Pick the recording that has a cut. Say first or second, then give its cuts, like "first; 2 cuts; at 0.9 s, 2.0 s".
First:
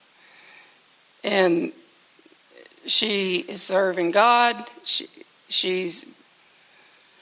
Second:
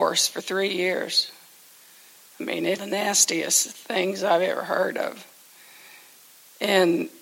second; 1 cut; at 2.8 s